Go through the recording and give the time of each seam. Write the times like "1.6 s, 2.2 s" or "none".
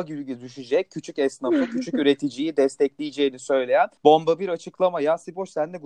4.0 s

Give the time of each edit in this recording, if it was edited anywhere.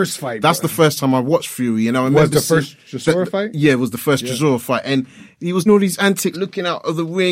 5.7 s, 6.3 s

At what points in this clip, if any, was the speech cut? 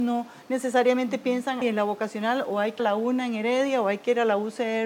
1.6 s, 2.8 s

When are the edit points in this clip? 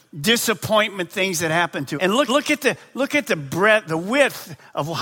2.0 s, 2.3 s, 3.8 s

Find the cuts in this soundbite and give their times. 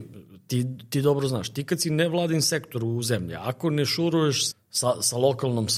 4.5 s

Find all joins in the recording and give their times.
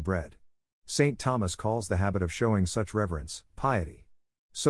none

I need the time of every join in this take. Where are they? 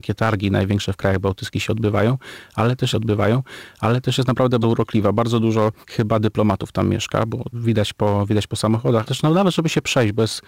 2.9 s, 4.6 s, 5.8 s, 7.5 s, 9.1 s

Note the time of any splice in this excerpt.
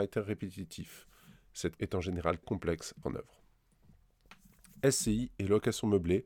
1.8 s, 2.4 s, 3.0 s

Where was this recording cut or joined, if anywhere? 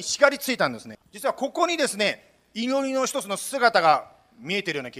1.0 s

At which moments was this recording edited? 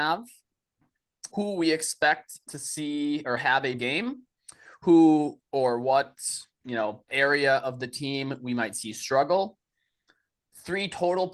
1.3 s, 3.8 s, 5.4 s, 7.1 s

